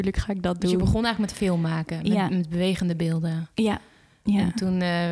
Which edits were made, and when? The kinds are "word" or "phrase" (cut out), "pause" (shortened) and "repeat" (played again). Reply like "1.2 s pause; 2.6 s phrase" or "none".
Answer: none